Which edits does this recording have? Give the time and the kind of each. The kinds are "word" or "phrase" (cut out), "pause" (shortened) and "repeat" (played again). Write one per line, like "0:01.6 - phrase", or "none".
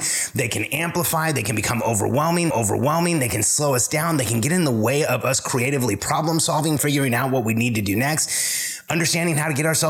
0:02.5 - repeat
0:06.8 - word